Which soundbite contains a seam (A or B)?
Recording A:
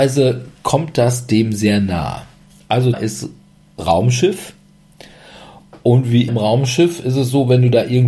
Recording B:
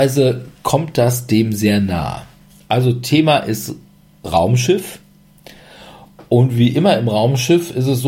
A